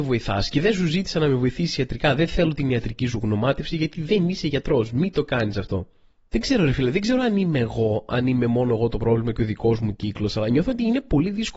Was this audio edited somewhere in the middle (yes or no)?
no